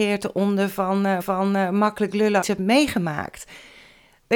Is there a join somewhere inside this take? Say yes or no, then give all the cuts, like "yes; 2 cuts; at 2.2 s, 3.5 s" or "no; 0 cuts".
yes; 2 cuts; at 1.2 s, 2.4 s